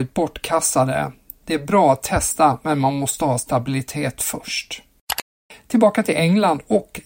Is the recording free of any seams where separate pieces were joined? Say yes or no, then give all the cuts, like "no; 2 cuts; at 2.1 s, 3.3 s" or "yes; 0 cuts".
yes; 0 cuts